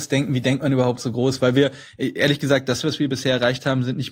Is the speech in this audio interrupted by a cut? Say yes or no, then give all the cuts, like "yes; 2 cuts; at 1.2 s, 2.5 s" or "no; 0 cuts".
no; 0 cuts